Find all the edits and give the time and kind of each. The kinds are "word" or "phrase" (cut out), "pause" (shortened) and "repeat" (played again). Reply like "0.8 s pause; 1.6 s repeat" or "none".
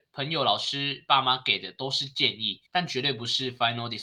2.7 s pause